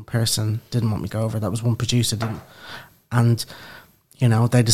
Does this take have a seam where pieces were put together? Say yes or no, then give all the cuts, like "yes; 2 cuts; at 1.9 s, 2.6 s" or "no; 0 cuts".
yes; 1 cut; at 1.1 s